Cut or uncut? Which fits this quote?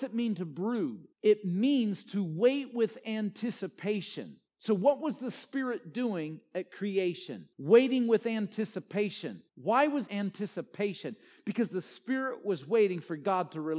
cut